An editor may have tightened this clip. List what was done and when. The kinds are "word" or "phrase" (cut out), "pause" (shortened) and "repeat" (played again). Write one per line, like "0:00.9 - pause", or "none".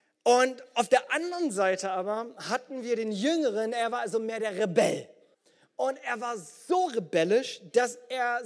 0:05.3 - pause